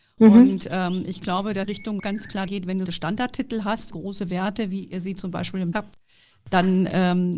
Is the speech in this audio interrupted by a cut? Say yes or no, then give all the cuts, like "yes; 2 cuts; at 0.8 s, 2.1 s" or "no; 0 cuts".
yes; 6 cuts; at 1.6 s, 2.0 s, 2.5 s, 2.9 s, 3.9 s, 5.7 s